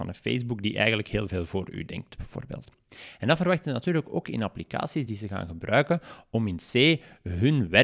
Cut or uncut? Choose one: uncut